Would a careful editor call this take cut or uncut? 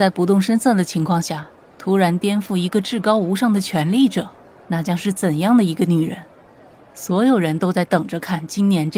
uncut